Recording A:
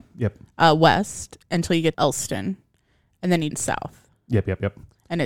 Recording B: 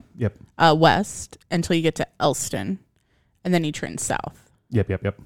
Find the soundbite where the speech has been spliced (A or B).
A